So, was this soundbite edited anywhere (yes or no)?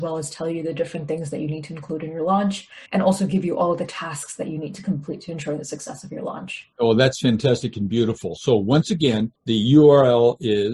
yes